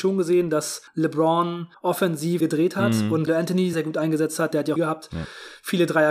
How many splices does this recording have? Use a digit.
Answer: 4